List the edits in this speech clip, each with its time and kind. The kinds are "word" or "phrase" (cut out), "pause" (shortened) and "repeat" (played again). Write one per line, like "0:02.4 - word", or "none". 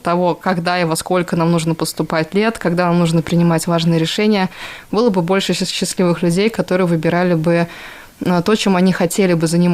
none